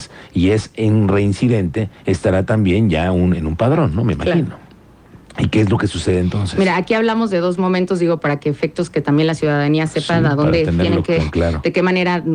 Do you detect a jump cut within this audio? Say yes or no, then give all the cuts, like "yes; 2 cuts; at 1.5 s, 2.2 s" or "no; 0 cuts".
no; 0 cuts